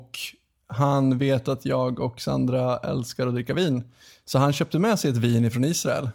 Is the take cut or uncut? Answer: uncut